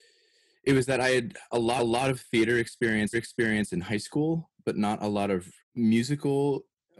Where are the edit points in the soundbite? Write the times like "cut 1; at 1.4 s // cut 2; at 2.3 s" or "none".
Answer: cut 1; at 1.8 s // cut 2; at 3.1 s // cut 3; at 5.6 s